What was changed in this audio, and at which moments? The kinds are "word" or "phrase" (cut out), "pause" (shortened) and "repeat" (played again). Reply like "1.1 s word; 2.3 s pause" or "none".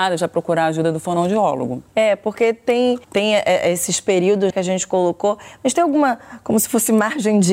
1.9 s pause; 3.0 s pause; 4.5 s word